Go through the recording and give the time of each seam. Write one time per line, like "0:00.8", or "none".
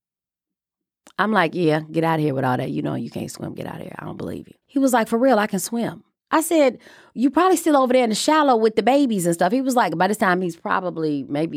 0:04.6